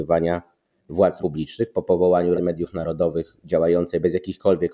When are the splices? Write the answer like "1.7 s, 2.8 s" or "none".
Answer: 1.2 s, 2.3 s